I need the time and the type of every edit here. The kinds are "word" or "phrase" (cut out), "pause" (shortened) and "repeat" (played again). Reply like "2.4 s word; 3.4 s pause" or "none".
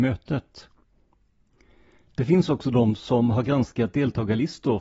none